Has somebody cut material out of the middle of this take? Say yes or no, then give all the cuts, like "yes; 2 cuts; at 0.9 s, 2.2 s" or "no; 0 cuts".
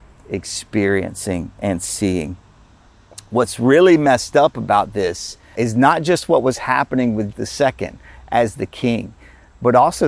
yes; 2 cuts; at 5.6 s, 7.3 s